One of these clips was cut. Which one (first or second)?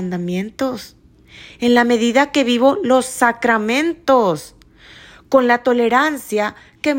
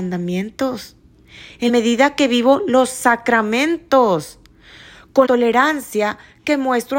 second